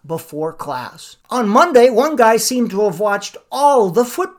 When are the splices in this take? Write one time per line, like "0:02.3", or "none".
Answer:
0:01.2